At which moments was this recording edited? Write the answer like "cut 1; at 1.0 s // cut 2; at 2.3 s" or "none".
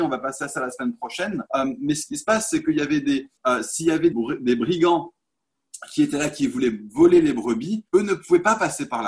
cut 1; at 1.5 s // cut 2; at 3.4 s // cut 3; at 4.1 s // cut 4; at 7.9 s